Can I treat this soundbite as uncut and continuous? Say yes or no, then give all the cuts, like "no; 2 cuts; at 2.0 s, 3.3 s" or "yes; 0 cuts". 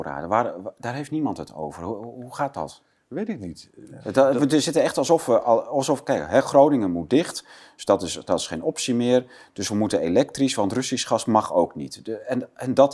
yes; 0 cuts